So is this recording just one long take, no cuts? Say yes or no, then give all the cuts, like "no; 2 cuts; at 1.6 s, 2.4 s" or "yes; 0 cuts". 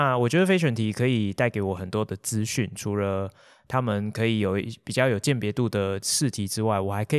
yes; 0 cuts